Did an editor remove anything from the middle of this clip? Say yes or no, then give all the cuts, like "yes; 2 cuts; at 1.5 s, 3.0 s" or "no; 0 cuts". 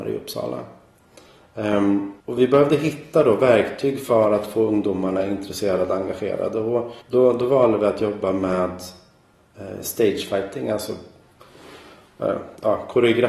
yes; 2 cuts; at 2.2 s, 7.0 s